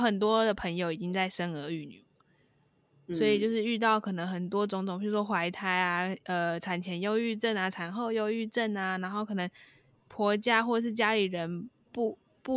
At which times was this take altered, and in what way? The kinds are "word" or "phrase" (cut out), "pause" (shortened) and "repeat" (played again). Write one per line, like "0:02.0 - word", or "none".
none

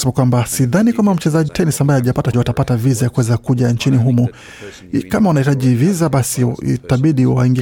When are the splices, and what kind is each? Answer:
0:01.5 - word
0:02.3 - word

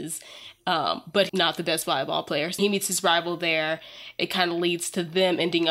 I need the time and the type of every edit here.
0:01.3 - word
0:02.6 - word
0:04.2 - word

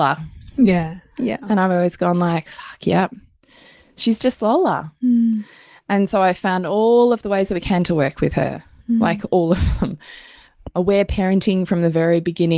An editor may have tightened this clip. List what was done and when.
none

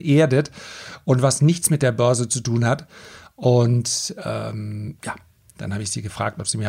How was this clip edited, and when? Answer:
none

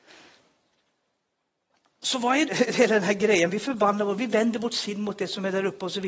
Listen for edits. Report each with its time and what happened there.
0:02.4 - word
0:03.5 - word

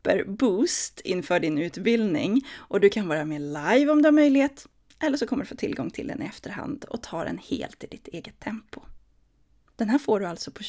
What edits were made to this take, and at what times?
none

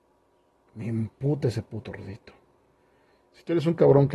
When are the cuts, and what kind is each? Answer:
none

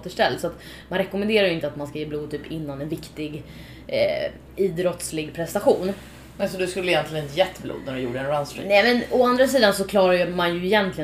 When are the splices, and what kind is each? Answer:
none

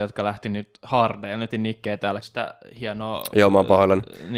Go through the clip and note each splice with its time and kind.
0:01.5 - word
0:02.2 - phrase

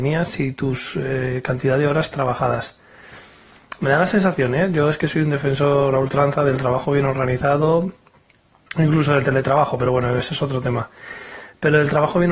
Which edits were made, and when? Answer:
none

